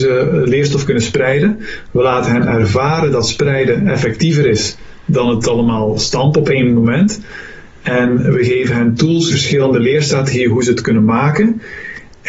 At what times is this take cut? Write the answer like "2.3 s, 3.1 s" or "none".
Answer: 9.3 s